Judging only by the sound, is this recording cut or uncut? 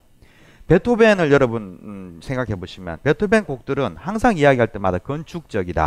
uncut